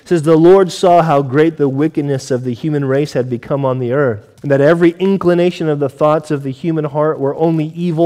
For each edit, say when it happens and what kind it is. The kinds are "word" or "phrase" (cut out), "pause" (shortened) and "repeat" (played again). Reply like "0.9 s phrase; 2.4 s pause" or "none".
4.4 s pause